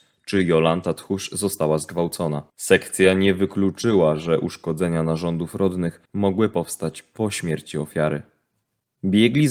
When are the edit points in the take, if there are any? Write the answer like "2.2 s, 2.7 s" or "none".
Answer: 2.5 s, 6.1 s